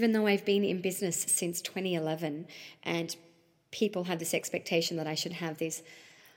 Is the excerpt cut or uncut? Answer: uncut